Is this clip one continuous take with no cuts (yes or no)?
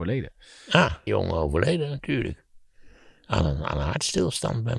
no